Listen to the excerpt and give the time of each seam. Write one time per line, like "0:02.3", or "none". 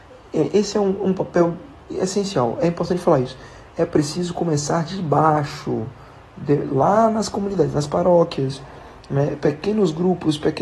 none